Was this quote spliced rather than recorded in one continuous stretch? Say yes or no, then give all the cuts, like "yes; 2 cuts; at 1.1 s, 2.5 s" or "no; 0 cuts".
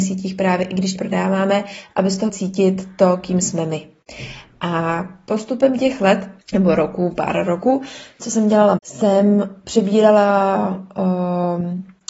yes; 4 cuts; at 1.0 s, 2.3 s, 6.4 s, 8.8 s